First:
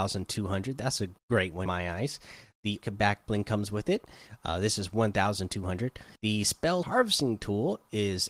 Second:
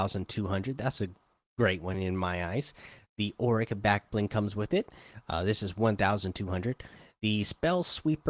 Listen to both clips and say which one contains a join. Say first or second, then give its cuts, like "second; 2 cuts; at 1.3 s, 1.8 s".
first; 5 cuts; at 1.2 s, 1.7 s, 2.8 s, 6.2 s, 6.8 s